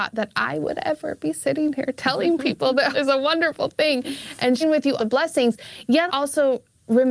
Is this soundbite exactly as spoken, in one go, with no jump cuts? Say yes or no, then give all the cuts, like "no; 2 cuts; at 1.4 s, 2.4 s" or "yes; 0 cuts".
no; 4 cuts; at 2.9 s, 4.6 s, 5.0 s, 6.1 s